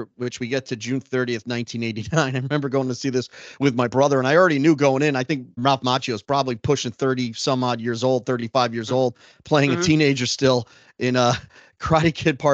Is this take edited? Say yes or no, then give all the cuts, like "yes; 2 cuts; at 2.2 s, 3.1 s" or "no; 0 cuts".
yes; 1 cut; at 5.6 s